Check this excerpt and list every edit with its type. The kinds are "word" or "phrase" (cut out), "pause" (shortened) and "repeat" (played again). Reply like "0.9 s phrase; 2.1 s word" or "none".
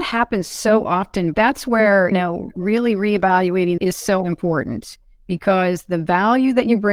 1.3 s word; 2.1 s word; 3.8 s phrase